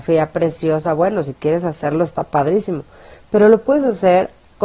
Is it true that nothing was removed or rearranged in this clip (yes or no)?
yes